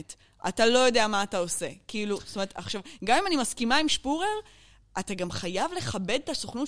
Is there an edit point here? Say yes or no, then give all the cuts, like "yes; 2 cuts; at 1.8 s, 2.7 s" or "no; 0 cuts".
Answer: no; 0 cuts